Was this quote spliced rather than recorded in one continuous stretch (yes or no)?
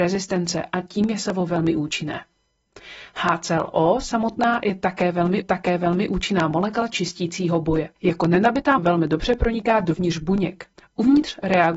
yes